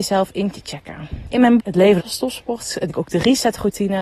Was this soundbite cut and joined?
yes; 3 cuts; at 1.6 s, 2.0 s, 2.9 s

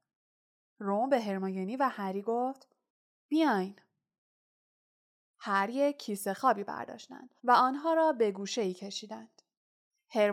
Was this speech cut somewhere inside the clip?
yes; 1 cut; at 7.4 s

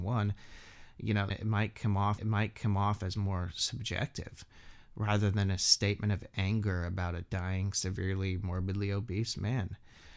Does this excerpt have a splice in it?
yes; 2 cuts; at 1.3 s, 2.2 s

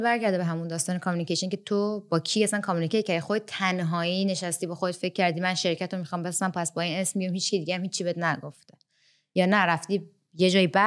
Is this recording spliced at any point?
no; 0 cuts

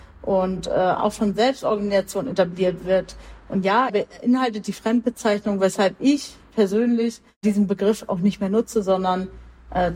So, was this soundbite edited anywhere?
yes; 1 cut; at 3.9 s

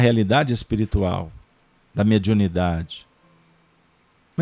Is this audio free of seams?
no; 1 cut; at 1.8 s

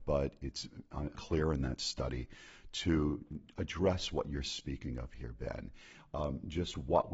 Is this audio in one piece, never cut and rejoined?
no; 1 cut; at 1.1 s

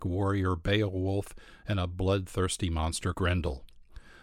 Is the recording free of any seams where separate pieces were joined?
no; 1 cut; at 3.1 s

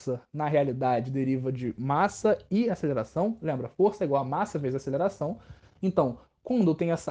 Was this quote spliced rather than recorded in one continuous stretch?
no; 0 cuts

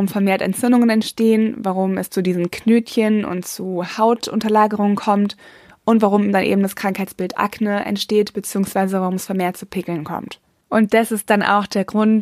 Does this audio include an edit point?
no; 0 cuts

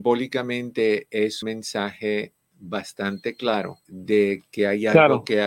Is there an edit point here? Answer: yes; 2 cuts; at 1.4 s, 3.8 s

